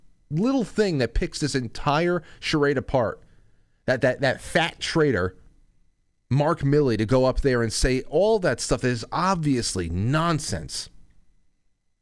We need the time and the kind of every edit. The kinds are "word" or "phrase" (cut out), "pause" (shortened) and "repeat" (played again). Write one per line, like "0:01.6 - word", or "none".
none